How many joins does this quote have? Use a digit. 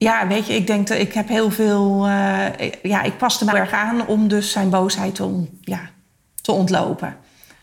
1